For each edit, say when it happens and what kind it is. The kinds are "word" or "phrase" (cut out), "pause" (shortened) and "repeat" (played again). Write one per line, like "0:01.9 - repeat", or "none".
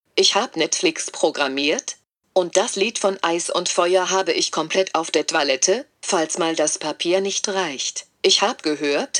none